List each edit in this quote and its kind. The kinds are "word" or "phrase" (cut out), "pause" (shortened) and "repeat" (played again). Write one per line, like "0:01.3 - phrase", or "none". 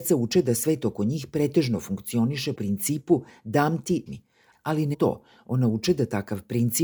0:02.5 - word
0:04.1 - word
0:04.9 - word